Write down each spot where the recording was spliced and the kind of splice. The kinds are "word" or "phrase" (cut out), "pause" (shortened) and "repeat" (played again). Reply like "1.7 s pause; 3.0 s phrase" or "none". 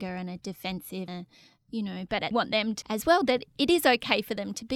1.1 s word; 2.3 s phrase; 2.8 s word